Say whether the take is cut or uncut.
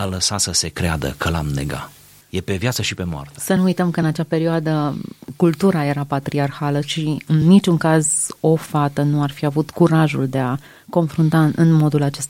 uncut